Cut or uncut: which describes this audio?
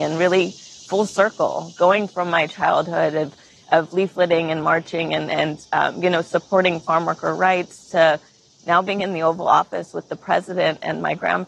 uncut